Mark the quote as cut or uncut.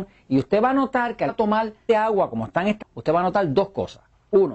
cut